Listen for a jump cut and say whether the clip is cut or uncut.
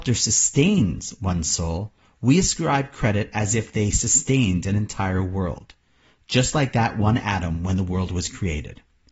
uncut